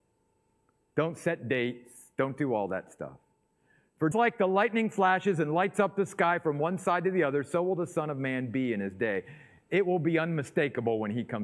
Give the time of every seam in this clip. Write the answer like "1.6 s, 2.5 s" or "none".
4.1 s